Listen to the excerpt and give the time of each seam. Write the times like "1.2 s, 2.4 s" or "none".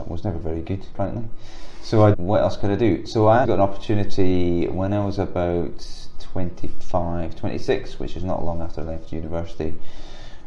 0.9 s, 2.1 s, 3.4 s